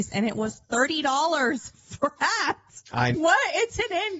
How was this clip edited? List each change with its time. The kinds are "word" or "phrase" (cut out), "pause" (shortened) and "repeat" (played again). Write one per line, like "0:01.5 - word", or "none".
0:02.2 - word
0:03.1 - word